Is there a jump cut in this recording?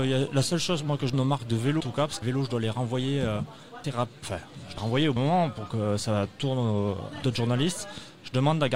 yes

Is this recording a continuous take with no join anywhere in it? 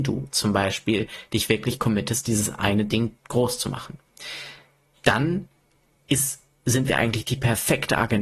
yes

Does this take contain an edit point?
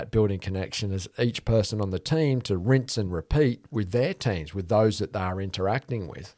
no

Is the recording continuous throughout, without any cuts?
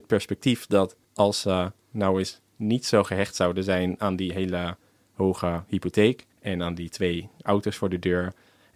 no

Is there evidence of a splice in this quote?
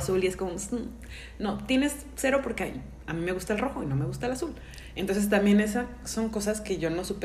no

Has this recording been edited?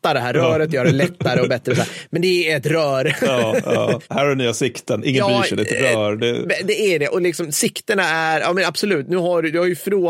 no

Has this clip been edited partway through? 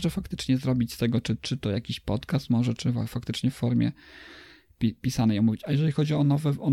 no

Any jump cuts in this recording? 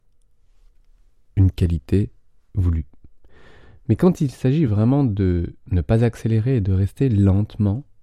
no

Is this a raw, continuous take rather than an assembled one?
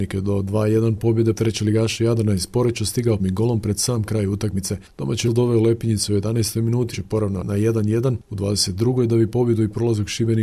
no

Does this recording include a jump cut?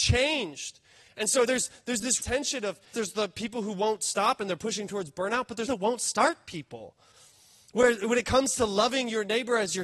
yes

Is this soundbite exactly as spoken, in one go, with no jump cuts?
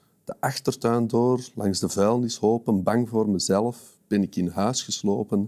yes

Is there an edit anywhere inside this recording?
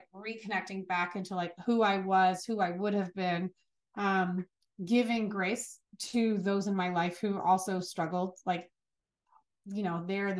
yes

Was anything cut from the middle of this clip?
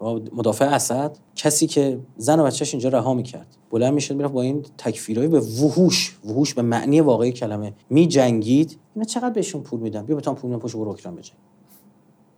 yes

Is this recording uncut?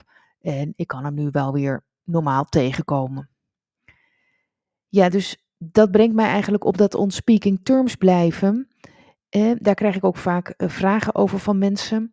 yes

